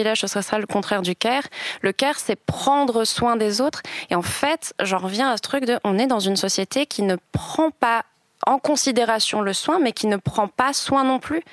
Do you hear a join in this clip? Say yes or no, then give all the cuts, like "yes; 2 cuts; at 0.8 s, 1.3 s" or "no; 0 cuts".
no; 0 cuts